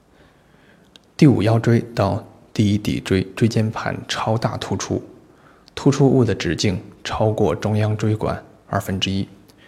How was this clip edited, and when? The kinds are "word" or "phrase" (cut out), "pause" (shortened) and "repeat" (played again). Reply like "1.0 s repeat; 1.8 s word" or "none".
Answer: none